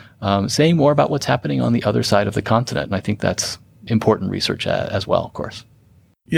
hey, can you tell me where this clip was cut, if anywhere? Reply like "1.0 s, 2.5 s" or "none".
3.9 s